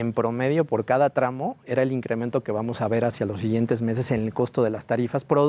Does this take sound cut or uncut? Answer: uncut